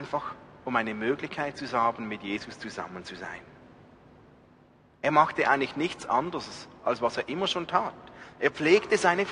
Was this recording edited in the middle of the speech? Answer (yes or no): no